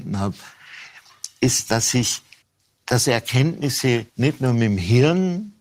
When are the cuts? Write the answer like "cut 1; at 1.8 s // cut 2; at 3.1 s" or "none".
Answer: cut 1; at 2.4 s // cut 2; at 4.1 s